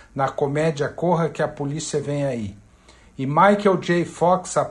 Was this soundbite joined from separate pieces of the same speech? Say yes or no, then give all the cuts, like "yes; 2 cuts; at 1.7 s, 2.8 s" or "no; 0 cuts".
no; 0 cuts